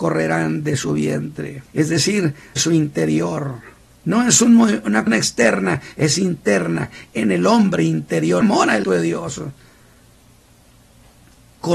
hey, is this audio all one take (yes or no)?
no